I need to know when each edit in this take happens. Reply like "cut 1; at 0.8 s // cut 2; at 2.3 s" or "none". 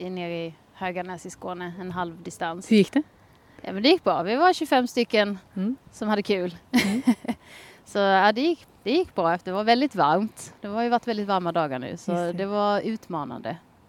none